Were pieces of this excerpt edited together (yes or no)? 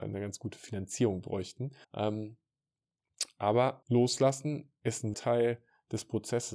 yes